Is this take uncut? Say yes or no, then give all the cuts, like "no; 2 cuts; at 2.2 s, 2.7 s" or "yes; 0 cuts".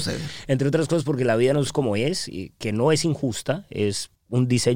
no; 1 cut; at 1.7 s